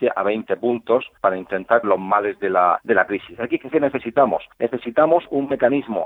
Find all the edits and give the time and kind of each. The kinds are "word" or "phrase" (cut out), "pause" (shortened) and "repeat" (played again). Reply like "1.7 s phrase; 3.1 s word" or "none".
1.2 s pause; 1.8 s word; 2.8 s phrase; 3.7 s word; 4.5 s pause